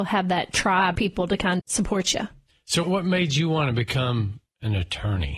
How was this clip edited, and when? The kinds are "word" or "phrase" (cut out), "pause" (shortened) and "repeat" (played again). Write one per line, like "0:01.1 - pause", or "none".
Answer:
0:01.0 - phrase
0:01.6 - word
0:02.8 - word